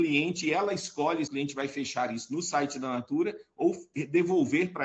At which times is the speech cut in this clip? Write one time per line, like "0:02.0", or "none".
0:01.3